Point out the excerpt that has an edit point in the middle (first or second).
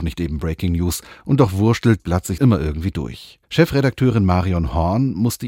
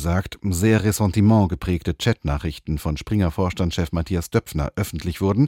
first